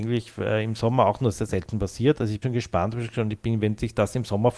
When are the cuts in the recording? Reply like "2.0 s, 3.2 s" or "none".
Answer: 2.4 s